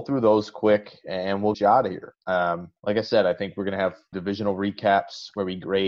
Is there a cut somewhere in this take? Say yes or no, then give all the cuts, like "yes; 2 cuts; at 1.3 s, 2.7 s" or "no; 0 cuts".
yes; 3 cuts; at 1.5 s, 2.8 s, 4.1 s